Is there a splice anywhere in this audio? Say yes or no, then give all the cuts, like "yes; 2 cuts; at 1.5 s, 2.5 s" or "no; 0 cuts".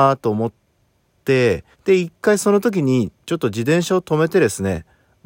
yes; 1 cut; at 1.7 s